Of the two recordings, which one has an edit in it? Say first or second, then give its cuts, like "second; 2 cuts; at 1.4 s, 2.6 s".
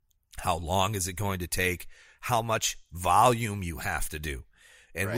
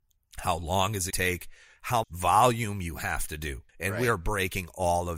second; 3 cuts; at 1.1 s, 2.0 s, 3.7 s